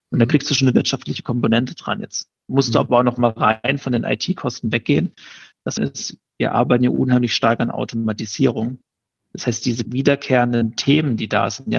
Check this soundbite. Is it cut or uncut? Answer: cut